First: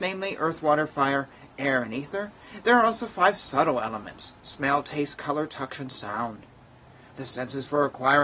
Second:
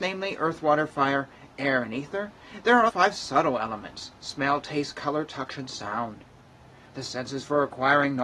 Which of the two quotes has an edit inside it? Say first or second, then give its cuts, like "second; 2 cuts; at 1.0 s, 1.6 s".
second; 1 cut; at 2.9 s